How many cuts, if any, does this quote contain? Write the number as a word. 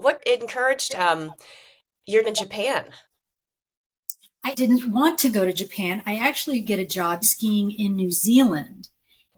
four